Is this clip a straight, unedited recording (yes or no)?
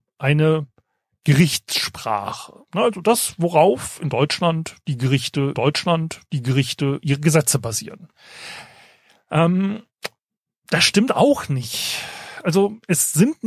no